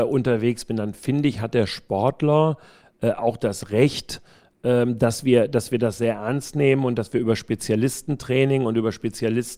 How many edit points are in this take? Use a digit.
0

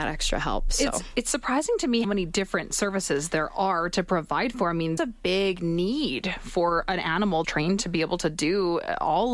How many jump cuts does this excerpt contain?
3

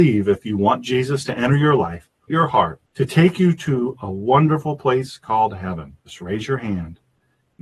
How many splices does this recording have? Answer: 3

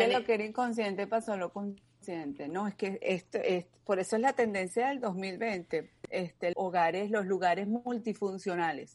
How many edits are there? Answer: 2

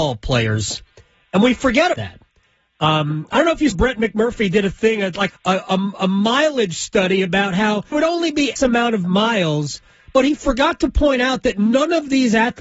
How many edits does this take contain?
5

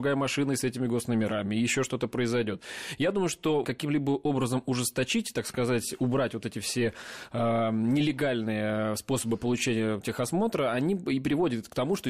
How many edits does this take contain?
1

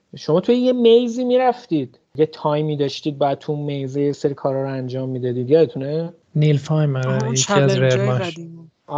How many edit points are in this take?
1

